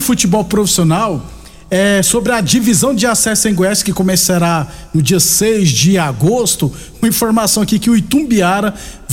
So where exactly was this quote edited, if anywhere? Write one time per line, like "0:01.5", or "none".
none